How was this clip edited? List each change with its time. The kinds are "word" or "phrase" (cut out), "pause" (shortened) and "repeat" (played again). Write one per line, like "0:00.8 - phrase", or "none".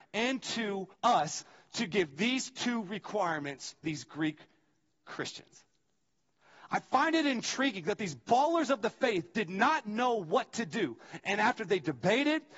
0:00.9 - pause
0:03.8 - word